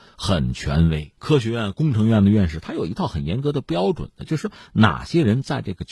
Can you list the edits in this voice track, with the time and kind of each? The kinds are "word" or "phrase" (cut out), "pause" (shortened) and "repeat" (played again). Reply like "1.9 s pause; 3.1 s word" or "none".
1.2 s pause